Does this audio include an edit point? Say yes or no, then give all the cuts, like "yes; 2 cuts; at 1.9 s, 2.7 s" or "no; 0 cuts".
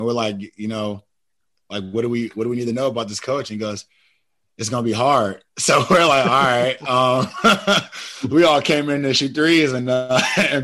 yes; 1 cut; at 1.4 s